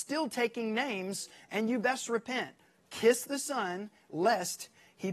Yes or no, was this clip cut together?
no